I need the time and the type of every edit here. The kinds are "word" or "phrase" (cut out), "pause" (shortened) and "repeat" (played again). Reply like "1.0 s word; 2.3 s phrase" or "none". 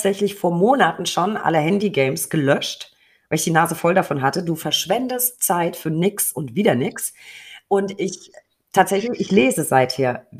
none